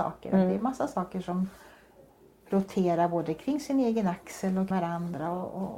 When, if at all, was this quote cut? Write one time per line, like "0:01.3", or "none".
0:04.7